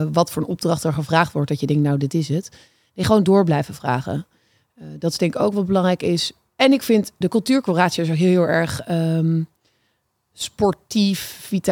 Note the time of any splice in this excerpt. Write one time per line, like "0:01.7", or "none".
0:07.2